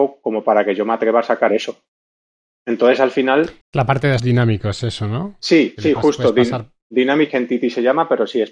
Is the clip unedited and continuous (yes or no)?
no